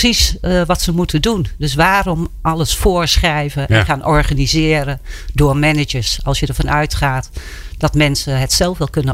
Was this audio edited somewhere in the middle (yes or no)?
no